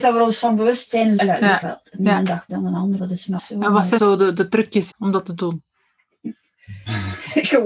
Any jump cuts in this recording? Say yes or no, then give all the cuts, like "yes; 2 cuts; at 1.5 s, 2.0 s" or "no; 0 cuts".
yes; 7 cuts; at 1.2 s, 1.6 s, 2.5 s, 3.0 s, 3.4 s, 4.0 s, 4.9 s